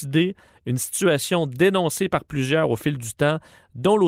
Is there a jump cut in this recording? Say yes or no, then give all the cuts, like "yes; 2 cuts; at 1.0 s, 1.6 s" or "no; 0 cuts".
no; 0 cuts